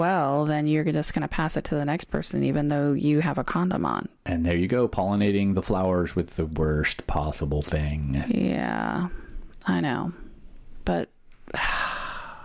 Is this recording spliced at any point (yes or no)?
no